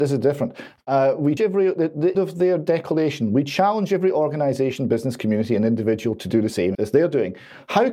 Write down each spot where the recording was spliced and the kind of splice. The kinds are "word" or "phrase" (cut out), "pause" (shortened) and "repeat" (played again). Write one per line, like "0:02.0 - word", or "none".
0:01.4 - word
0:02.1 - word
0:06.7 - word